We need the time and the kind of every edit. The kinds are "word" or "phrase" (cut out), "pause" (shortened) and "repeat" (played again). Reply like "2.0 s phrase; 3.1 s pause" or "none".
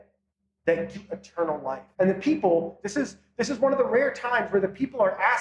0.9 s word; 1.9 s pause; 2.8 s word